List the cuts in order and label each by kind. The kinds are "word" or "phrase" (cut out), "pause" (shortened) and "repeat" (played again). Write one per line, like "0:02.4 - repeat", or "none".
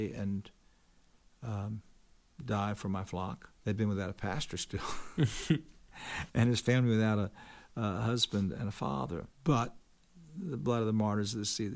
0:03.6 - pause
0:09.3 - pause